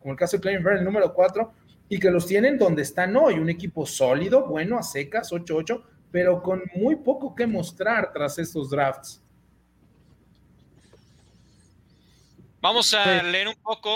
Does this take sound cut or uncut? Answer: uncut